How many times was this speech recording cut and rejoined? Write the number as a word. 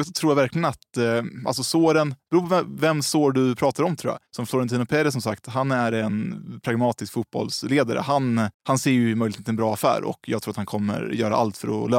two